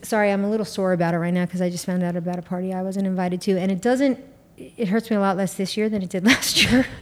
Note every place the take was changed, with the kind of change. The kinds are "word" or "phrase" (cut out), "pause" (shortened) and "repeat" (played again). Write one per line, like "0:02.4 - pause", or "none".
none